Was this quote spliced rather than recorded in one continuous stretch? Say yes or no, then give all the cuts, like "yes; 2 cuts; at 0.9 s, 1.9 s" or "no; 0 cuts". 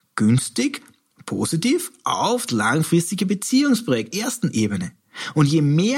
yes; 2 cuts; at 2.5 s, 4.1 s